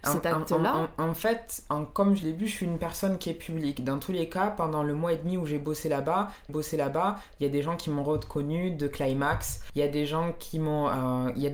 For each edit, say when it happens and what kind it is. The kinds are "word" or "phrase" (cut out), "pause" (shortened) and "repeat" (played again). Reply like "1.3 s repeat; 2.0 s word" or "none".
2.2 s phrase; 6.5 s repeat